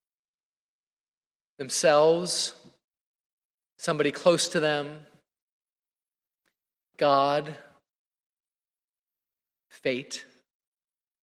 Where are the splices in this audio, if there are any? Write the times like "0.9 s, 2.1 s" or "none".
none